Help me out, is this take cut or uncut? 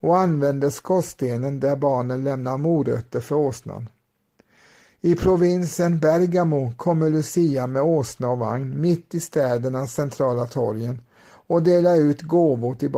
uncut